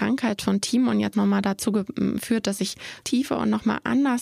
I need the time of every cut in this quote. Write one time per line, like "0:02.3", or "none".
0:01.1
0:03.0